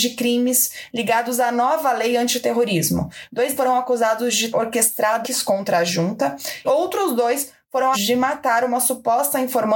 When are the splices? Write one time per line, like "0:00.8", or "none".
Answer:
0:03.6
0:04.5
0:05.2
0:06.6
0:07.9